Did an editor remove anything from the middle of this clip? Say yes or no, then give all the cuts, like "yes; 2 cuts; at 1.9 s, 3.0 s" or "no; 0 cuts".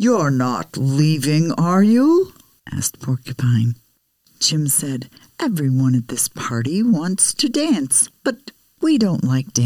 no; 0 cuts